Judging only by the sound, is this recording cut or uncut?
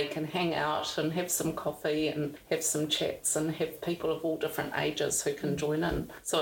uncut